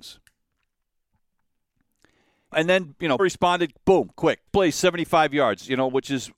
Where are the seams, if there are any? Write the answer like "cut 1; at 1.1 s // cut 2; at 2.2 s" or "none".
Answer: cut 1; at 2.5 s // cut 2; at 3.2 s // cut 3; at 4.5 s